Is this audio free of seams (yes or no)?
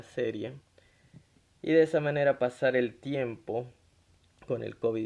yes